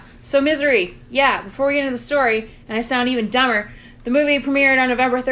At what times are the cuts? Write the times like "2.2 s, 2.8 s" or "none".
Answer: none